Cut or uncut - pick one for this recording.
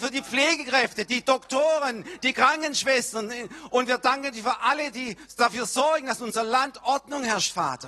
uncut